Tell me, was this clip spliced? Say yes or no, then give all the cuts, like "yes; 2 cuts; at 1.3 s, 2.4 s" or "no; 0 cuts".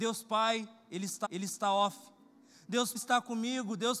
yes; 2 cuts; at 1.2 s, 2.9 s